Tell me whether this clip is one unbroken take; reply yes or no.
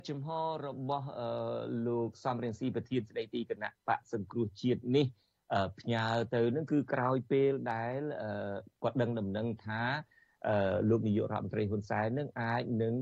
yes